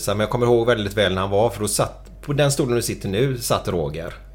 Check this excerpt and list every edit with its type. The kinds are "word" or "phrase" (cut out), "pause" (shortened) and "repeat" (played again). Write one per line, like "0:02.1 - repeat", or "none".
none